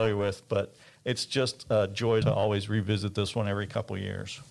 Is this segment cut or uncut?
cut